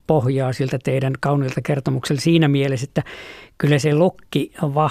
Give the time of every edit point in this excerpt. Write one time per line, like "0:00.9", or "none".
none